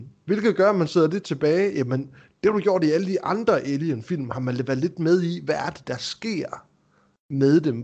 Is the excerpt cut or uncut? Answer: uncut